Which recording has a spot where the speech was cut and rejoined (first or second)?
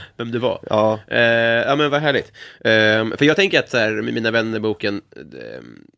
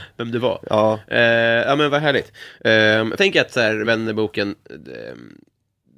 second